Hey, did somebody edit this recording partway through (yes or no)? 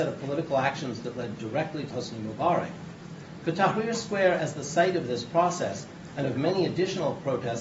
yes